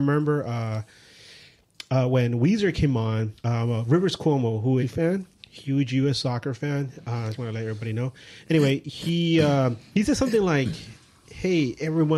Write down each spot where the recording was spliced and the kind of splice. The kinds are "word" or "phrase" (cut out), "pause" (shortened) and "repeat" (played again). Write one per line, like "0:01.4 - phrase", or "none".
0:03.4 - pause
0:04.8 - phrase
0:07.3 - word